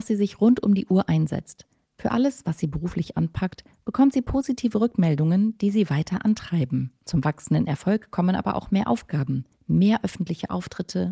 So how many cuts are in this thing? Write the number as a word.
three